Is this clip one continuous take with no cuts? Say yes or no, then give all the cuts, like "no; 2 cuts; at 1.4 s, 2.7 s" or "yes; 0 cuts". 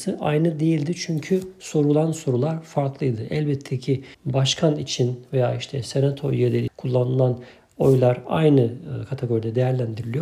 no; 2 cuts; at 4.1 s, 6.7 s